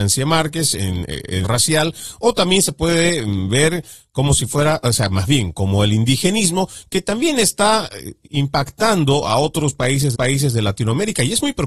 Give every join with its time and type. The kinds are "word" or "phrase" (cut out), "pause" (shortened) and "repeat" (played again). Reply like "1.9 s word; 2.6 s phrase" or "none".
1.4 s phrase; 10.1 s repeat